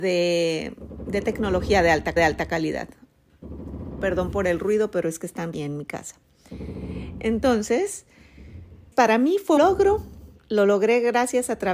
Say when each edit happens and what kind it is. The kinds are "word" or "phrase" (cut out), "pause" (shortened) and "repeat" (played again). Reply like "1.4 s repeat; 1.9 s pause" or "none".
2.2 s repeat; 5.5 s phrase; 8.9 s word; 9.6 s word; 10.4 s pause